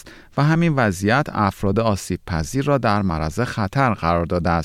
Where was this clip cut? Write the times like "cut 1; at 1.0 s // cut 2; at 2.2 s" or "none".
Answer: none